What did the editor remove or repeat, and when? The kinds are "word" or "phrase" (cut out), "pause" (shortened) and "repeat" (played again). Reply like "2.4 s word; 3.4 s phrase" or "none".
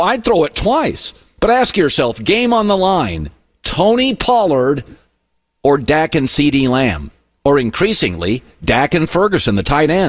none